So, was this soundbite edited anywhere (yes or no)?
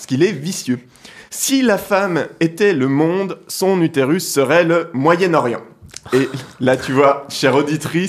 yes